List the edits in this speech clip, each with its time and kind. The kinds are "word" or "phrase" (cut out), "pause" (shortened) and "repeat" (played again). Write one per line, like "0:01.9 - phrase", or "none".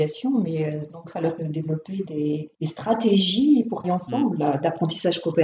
0:01.4 - phrase
0:02.5 - pause
0:03.8 - word